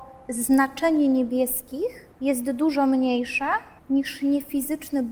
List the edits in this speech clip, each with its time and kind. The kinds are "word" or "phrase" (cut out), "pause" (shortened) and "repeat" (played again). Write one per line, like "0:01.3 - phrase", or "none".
0:02.1 - pause
0:03.8 - pause